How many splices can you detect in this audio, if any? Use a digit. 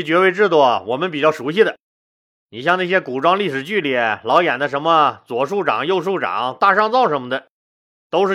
0